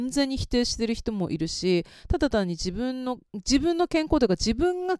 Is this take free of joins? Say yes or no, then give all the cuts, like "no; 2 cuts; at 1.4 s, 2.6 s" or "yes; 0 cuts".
no; 1 cut; at 3.3 s